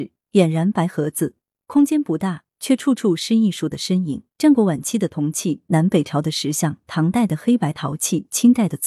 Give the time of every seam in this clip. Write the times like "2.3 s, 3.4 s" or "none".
4.3 s